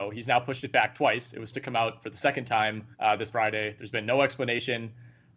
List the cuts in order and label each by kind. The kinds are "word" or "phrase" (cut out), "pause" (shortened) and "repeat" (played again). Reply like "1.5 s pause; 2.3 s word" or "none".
1.5 s word; 2.9 s pause; 3.3 s word